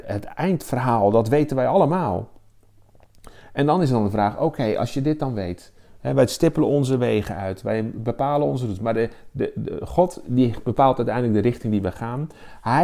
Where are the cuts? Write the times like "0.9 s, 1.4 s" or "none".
none